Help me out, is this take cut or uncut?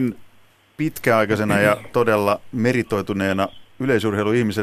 uncut